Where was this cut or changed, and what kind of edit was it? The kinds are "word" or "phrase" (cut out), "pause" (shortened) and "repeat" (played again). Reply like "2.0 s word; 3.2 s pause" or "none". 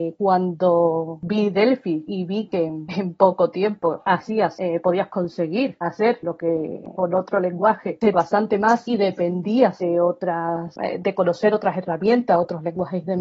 8.1 s word